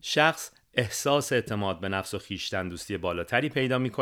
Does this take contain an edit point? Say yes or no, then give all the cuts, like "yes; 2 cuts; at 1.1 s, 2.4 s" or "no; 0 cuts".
no; 0 cuts